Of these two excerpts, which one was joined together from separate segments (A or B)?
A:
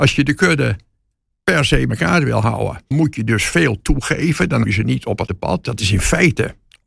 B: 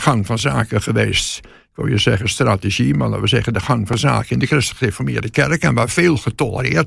A